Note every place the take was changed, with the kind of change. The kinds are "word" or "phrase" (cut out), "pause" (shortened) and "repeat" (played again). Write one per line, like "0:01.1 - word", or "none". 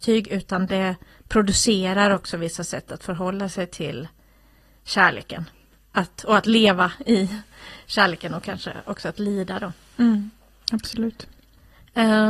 none

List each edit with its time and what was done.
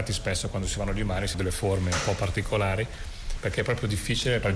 0:01.3 - word

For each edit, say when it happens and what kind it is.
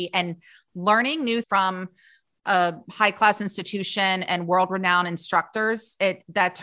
0:01.4 - word

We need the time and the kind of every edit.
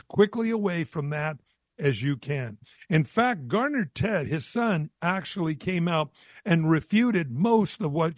none

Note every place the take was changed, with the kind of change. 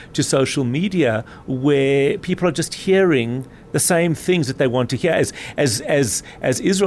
none

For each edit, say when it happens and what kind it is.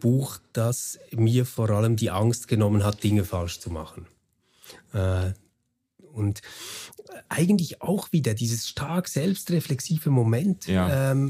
0:07.3 - pause

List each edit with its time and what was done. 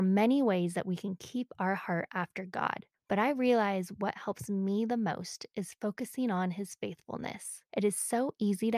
0:02.9 - pause
0:07.7 - pause

